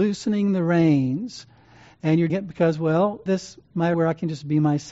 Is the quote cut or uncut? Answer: cut